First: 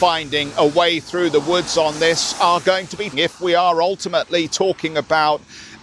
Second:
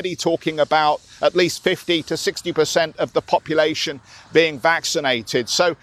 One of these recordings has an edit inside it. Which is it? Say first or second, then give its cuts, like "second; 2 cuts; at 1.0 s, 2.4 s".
first; 1 cut; at 3.1 s